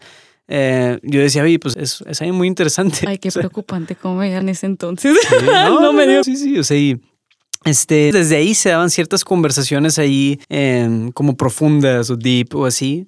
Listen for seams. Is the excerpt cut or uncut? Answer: cut